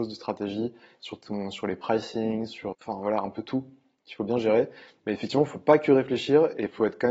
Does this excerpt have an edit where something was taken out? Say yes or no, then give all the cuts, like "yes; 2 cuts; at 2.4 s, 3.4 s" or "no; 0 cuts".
yes; 1 cut; at 2.7 s